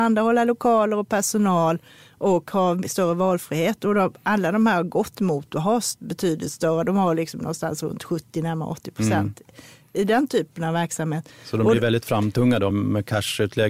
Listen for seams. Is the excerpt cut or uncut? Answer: cut